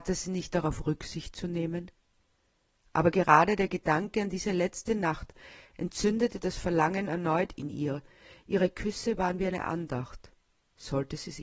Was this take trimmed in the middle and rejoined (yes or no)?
no